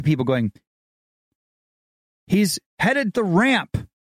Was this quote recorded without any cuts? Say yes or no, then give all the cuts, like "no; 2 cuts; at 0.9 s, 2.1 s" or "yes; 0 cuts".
no; 1 cut; at 3.1 s